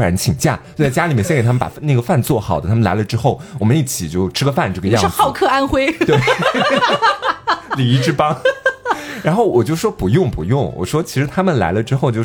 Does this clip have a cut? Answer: no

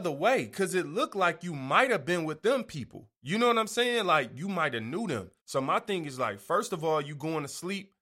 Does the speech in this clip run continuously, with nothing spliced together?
no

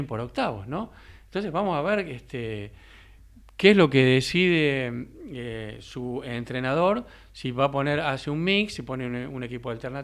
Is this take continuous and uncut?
yes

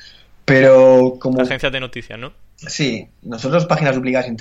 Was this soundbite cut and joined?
no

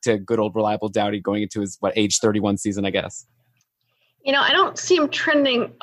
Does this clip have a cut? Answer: no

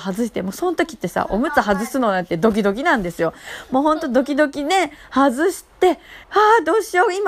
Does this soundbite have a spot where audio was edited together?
yes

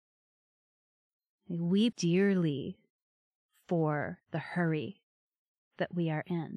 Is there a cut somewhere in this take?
yes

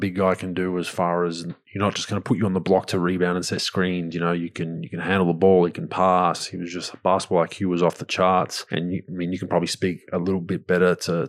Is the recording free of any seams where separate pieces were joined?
yes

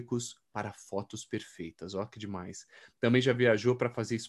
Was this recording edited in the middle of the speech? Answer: no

